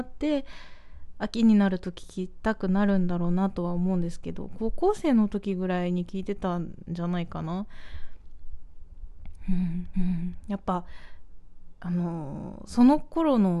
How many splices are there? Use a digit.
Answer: 1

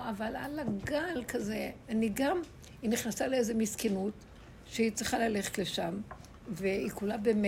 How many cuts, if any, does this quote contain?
1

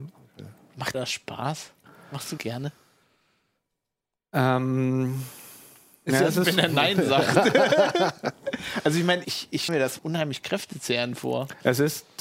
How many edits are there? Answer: 6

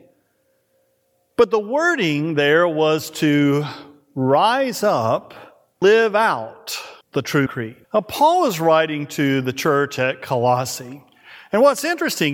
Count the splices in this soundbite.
4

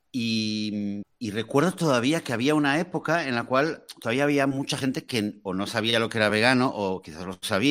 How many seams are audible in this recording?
0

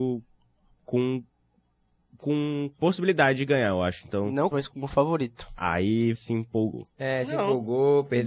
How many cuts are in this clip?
2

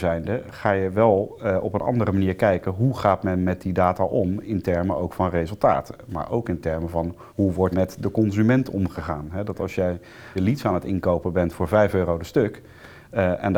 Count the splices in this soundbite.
3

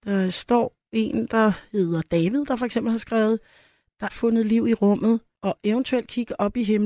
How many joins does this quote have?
2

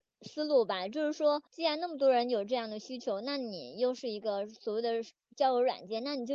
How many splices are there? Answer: 1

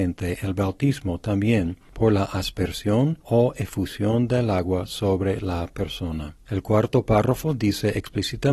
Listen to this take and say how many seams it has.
1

